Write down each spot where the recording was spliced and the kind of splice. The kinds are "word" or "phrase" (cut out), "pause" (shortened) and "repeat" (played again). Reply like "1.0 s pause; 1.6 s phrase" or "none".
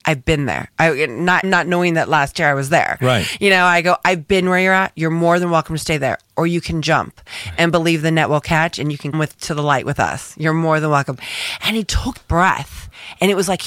1.4 s word; 9.1 s word; 12.2 s word